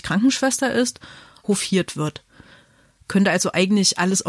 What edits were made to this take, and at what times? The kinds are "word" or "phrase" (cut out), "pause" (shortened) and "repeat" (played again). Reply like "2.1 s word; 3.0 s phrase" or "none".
1.4 s phrase